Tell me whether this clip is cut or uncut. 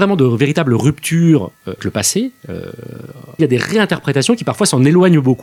cut